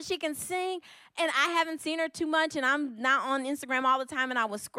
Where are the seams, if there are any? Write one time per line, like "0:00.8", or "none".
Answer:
none